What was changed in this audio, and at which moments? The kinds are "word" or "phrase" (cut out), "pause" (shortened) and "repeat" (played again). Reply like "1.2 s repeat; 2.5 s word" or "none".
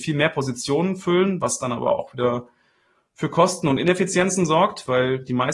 none